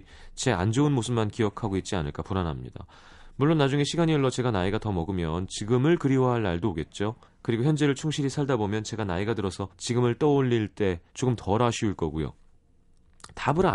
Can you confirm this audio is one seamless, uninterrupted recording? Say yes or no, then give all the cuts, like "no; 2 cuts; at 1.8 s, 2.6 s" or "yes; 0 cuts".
no; 3 cuts; at 7.2 s, 9.7 s, 11.1 s